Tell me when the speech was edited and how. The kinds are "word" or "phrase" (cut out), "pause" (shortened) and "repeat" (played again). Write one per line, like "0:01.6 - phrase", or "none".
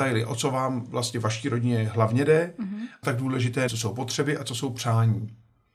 0:03.0 - phrase
0:03.7 - word

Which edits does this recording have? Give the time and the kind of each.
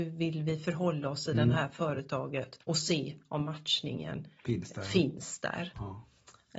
0:02.6 - pause

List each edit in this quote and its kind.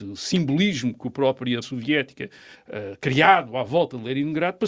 0:01.6 - word
0:02.5 - word

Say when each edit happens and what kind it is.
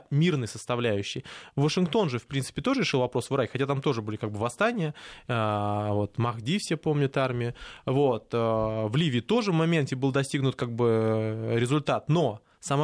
none

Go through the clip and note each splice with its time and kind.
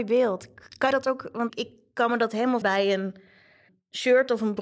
0:00.9 - word
0:01.5 - word
0:02.6 - word

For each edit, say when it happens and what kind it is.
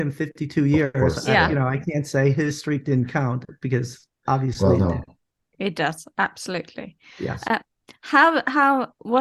none

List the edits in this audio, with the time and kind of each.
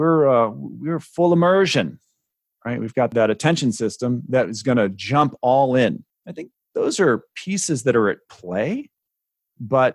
none

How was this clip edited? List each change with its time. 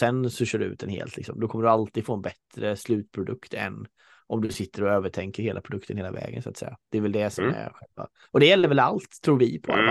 none

